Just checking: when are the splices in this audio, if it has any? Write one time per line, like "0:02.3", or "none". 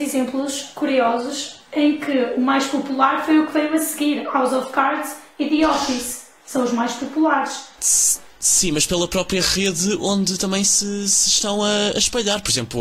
none